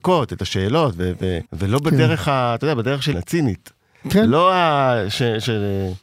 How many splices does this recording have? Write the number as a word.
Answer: two